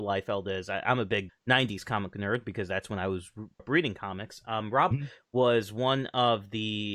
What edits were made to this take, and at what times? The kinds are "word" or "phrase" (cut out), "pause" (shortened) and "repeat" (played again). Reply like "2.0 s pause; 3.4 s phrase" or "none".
1.3 s word; 3.6 s word; 4.9 s word